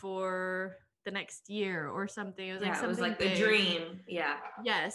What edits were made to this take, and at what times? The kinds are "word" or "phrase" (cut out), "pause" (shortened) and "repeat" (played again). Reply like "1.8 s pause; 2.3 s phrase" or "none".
none